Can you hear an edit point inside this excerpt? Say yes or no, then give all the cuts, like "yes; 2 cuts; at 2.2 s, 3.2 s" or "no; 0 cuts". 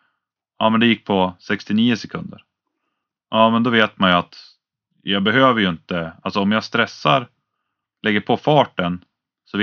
no; 0 cuts